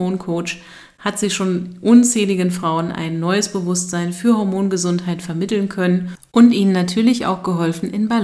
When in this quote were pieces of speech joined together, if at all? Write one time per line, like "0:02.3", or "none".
none